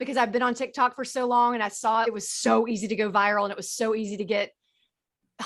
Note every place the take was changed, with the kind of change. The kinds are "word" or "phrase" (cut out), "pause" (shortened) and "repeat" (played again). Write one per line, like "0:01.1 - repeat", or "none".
0:02.0 - phrase